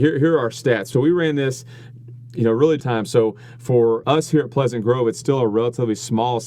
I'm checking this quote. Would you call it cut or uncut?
cut